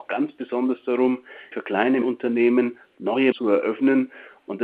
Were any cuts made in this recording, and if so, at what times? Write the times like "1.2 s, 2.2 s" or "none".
1.5 s, 2.0 s, 3.3 s